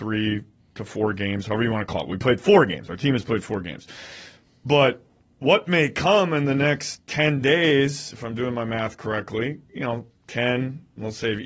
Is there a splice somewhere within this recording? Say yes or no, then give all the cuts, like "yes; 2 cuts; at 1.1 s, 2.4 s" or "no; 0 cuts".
no; 0 cuts